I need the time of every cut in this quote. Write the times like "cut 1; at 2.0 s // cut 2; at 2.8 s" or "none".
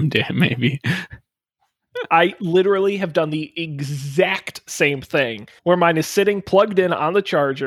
cut 1; at 5.6 s